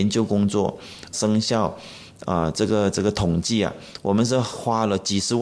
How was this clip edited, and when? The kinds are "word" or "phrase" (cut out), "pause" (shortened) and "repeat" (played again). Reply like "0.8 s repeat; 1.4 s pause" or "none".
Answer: 1.1 s phrase